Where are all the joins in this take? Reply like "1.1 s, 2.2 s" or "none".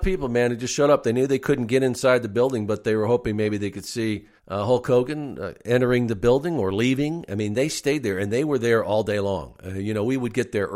4.4 s